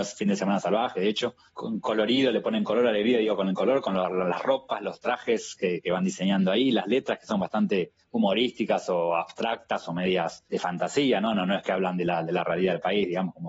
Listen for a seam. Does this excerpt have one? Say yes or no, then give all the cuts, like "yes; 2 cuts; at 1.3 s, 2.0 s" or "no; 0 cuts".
yes; 3 cuts; at 1.5 s, 8.0 s, 10.5 s